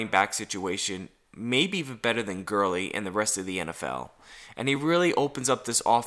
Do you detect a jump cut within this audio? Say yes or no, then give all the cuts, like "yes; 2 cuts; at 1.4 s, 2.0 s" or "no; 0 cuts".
no; 0 cuts